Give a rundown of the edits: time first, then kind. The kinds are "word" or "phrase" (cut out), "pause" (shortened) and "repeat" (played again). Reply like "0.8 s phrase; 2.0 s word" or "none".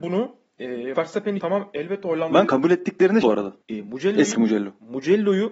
0.9 s word; 1.4 s word; 2.5 s phrase; 3.2 s word; 3.6 s pause; 4.3 s phrase